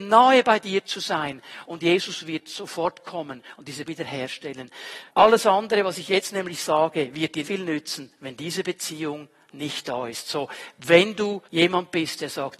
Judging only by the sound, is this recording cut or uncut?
cut